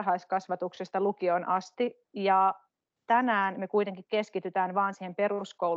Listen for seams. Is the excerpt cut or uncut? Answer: uncut